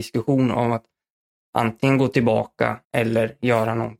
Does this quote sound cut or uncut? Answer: cut